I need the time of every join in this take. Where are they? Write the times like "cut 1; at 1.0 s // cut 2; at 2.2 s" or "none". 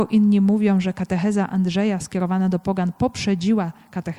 none